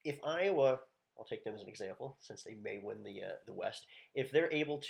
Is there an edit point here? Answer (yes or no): no